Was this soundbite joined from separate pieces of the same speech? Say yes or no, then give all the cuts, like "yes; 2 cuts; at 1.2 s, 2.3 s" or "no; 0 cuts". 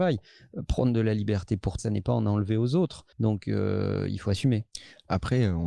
yes; 2 cuts; at 1.8 s, 3.1 s